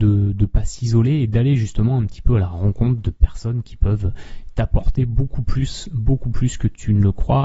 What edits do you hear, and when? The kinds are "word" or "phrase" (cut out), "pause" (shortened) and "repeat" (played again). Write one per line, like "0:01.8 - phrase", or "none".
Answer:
none